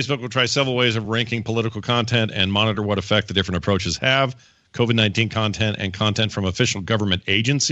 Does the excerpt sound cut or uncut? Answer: uncut